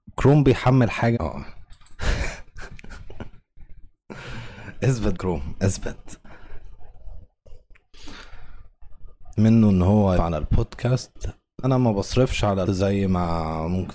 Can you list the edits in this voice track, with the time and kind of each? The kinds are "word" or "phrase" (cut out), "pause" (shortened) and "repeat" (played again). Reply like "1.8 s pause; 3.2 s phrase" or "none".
1.1 s word; 5.1 s word; 9.4 s word; 10.2 s word; 11.6 s word; 12.7 s word